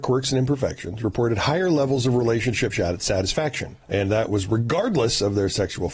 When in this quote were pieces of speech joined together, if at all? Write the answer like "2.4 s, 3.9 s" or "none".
3.8 s